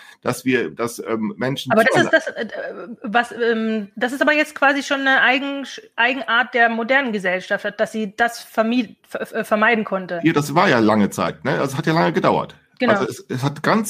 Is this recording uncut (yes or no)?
yes